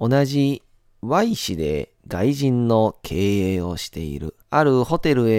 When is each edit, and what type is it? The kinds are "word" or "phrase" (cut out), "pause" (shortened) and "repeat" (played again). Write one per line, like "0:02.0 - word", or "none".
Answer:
0:02.0 - pause
0:04.4 - pause